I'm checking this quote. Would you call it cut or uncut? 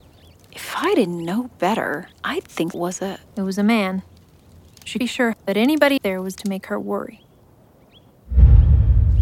cut